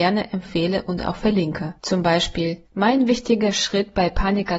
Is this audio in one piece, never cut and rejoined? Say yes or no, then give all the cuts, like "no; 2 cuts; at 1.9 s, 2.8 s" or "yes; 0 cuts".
no; 2 cuts; at 1.8 s, 2.6 s